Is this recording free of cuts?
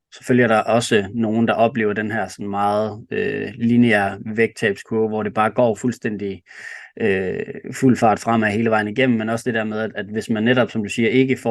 yes; 0 cuts

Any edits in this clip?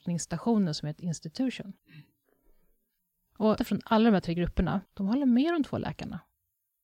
yes; 4 cuts; at 1.0 s, 1.8 s, 3.6 s, 4.9 s

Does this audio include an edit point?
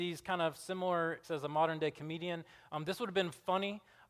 yes; 1 cut; at 1.2 s

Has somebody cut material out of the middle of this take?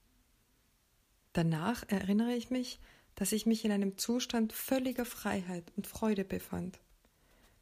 no; 0 cuts

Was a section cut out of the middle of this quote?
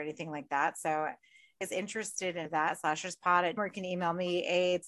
yes; 3 cuts; at 1.6 s, 2.4 s, 3.6 s

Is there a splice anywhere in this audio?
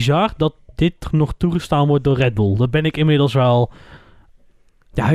no; 0 cuts

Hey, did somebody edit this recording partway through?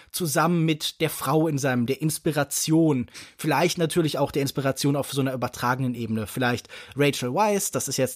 yes; 1 cut; at 1.9 s

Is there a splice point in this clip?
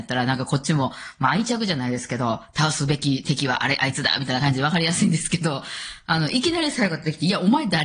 no; 0 cuts

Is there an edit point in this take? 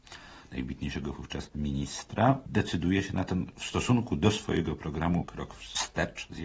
no; 0 cuts

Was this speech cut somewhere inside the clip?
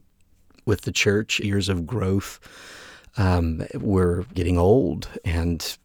yes; 2 cuts; at 1.4 s, 4.3 s

